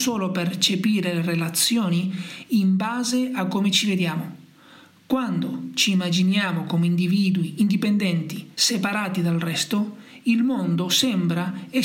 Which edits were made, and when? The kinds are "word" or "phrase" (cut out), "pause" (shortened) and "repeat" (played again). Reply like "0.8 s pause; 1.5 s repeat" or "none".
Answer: 8.5 s pause